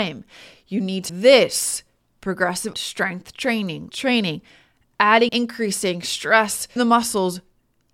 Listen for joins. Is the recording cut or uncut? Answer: cut